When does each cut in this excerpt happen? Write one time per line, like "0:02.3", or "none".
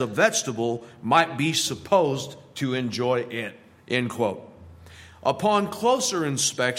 none